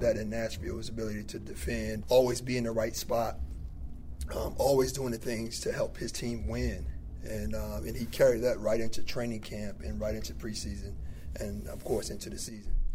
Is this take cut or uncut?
cut